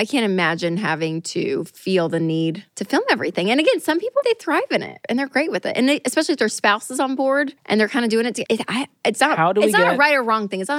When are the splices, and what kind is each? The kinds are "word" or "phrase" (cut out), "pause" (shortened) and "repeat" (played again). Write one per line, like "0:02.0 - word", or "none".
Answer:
0:02.7 - pause
0:04.2 - word
0:07.6 - pause
0:08.5 - word